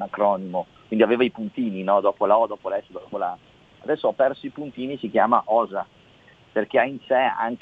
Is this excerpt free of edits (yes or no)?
yes